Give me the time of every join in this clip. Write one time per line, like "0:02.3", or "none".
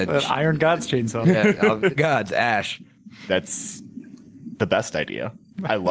0:02.0